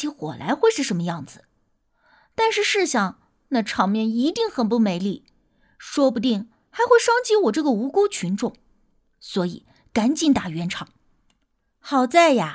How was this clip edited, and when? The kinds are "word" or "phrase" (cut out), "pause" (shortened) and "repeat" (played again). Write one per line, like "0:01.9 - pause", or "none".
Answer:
none